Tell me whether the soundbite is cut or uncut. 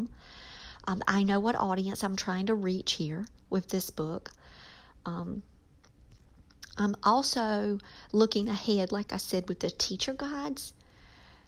uncut